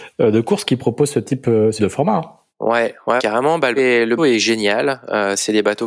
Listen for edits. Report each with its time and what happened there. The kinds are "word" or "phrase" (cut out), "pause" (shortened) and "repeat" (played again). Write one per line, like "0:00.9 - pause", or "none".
0:01.8 - word
0:03.2 - word
0:03.8 - word
0:04.2 - word